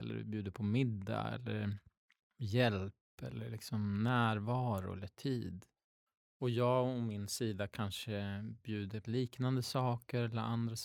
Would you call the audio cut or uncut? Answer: cut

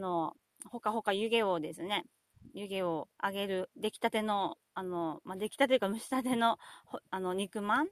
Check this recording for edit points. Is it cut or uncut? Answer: cut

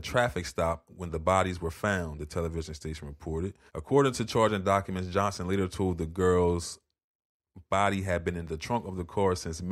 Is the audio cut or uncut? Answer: cut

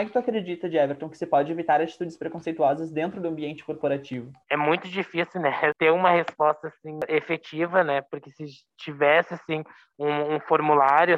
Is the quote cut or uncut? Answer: cut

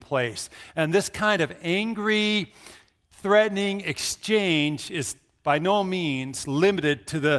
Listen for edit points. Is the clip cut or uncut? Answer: uncut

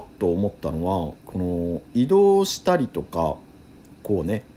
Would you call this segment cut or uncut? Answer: cut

